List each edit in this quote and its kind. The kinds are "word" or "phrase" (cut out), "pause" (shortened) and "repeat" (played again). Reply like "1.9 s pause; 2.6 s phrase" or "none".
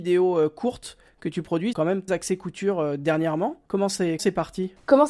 1.7 s word; 2.1 s word; 3.7 s pause; 4.2 s word

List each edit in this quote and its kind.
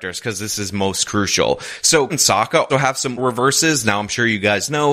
2.1 s word; 2.7 s word; 3.2 s word

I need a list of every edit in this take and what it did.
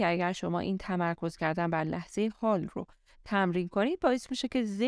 none

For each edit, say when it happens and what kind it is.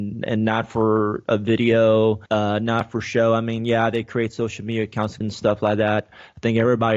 2.3 s pause; 5.2 s phrase

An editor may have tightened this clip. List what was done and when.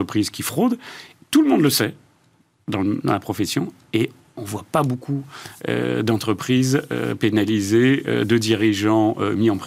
none

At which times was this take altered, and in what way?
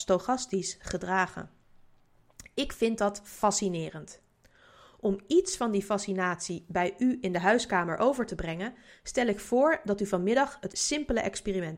10.7 s word

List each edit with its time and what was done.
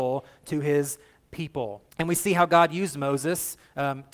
1.9 s pause

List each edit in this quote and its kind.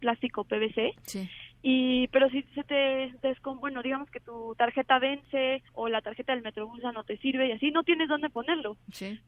5.7 s pause

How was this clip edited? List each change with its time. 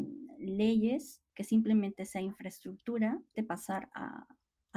3.3 s phrase

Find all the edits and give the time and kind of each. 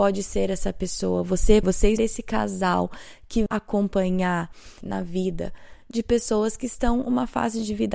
1.6 s phrase; 2.0 s phrase; 3.5 s word; 4.8 s phrase

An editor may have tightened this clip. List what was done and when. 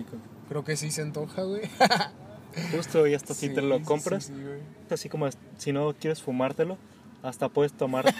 4.9 s word

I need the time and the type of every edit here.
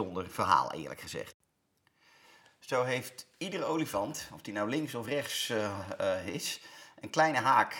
none

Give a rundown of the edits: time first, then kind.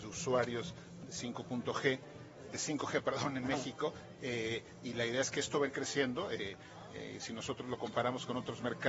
2.5 s word

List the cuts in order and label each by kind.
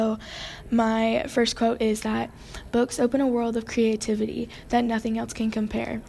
none

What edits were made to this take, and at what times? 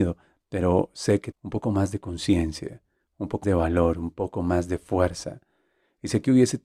1.3 s word; 3.4 s word

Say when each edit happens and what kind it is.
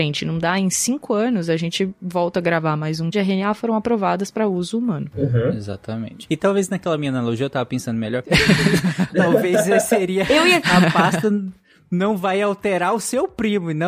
3.1 s phrase; 9.1 s word

